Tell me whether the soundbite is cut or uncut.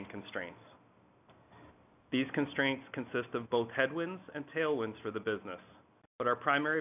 uncut